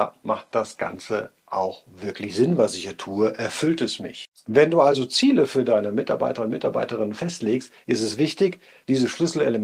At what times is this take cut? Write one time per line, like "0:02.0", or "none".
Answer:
none